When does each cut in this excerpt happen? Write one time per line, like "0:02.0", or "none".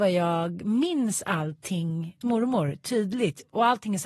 0:02.2